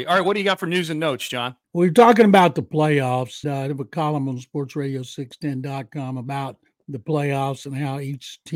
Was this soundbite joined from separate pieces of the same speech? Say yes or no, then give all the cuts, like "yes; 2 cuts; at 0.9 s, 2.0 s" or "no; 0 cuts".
yes; 3 cuts; at 1.6 s, 3.4 s, 6.7 s